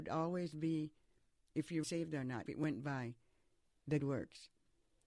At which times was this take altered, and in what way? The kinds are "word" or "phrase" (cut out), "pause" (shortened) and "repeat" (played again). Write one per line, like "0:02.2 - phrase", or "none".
0:01.5 - word
0:01.8 - word
0:02.5 - word
0:04.0 - word